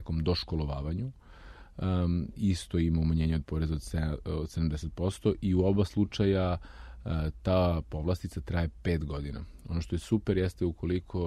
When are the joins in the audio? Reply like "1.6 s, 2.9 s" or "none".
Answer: none